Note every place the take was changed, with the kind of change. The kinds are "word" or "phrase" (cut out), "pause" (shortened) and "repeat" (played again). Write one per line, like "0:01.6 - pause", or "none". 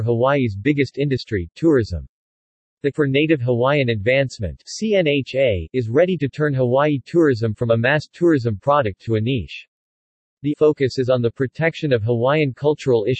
0:02.9 - word
0:10.5 - word